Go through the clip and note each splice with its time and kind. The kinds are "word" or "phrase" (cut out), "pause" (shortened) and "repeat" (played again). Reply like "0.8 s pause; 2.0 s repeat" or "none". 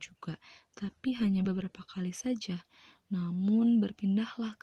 none